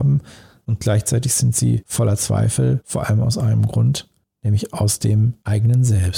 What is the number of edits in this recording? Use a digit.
0